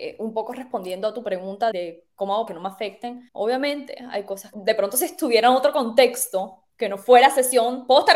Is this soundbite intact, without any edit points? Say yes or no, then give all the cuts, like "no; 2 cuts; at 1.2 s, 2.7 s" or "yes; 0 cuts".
no; 5 cuts; at 1.7 s, 2.5 s, 3.3 s, 4.5 s, 6.7 s